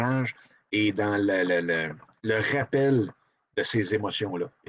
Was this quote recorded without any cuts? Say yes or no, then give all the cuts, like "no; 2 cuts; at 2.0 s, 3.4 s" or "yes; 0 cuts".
yes; 0 cuts